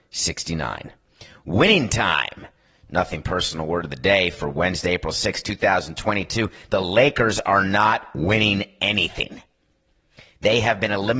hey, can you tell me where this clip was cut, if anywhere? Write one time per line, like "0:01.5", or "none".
none